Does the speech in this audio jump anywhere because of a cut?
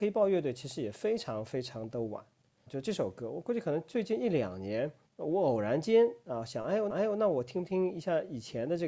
yes; 3 cuts; at 2.7 s, 5.1 s, 6.9 s

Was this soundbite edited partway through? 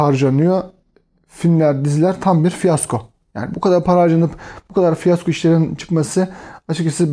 no; 0 cuts

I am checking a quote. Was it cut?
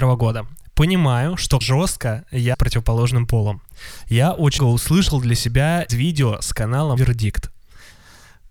yes; 5 cuts; at 1.6 s, 2.5 s, 4.6 s, 5.9 s, 7.0 s

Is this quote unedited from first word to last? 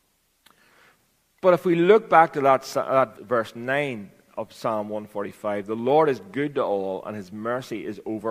no; 1 cut; at 3.1 s

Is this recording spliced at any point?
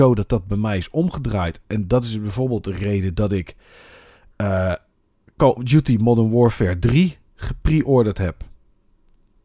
no; 0 cuts

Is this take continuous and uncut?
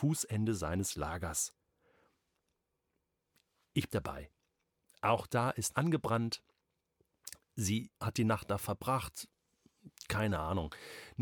no; 3 cuts; at 3.9 s, 5.7 s, 7.9 s

